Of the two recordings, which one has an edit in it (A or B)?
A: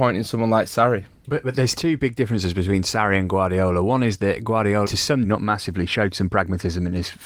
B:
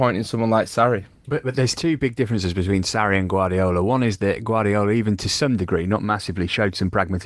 A